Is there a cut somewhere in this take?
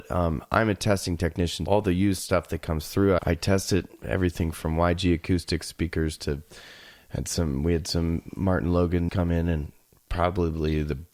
yes; 3 cuts; at 1.7 s, 3.2 s, 9.1 s

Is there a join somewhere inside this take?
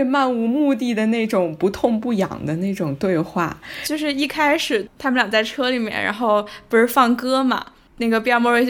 no; 0 cuts

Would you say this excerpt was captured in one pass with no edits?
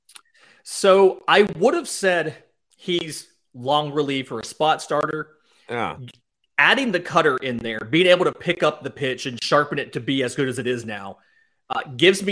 yes; 0 cuts

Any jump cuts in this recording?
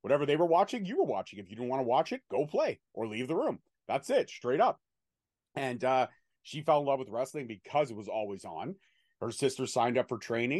no; 0 cuts

